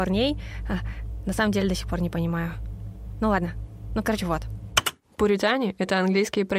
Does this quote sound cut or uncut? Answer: uncut